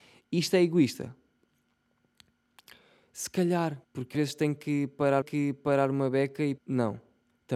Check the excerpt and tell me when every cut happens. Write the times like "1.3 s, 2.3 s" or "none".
3.8 s, 4.1 s, 5.2 s, 6.6 s

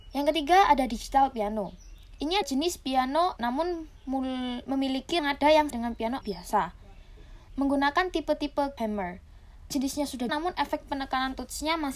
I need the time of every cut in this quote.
2.4 s, 3.4 s, 5.2 s, 5.7 s, 6.2 s, 8.8 s, 9.7 s, 10.3 s

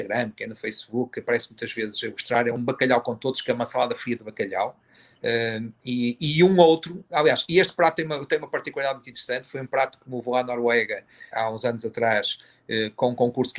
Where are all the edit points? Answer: 11.3 s

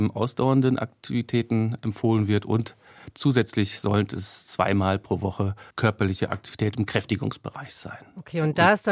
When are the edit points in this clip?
5.7 s

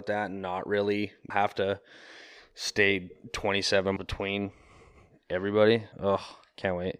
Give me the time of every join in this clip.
1.3 s, 4.0 s, 5.9 s

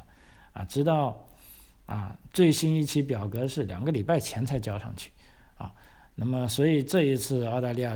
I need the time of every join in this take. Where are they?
none

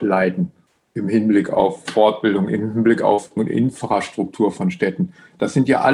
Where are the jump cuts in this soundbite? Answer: 1.9 s, 3.4 s

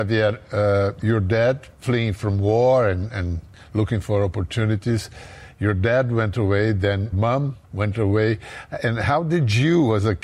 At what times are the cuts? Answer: 7.1 s, 7.6 s

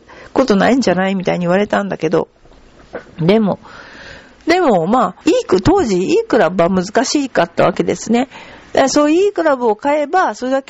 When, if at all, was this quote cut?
5.2 s

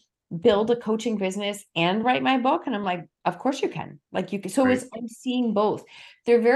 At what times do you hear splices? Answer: none

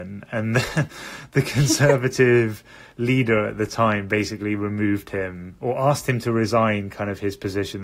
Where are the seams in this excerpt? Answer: none

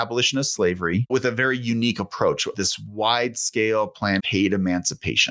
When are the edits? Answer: 1.1 s, 2.5 s, 4.2 s

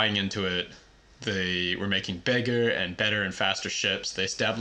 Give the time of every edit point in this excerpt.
none

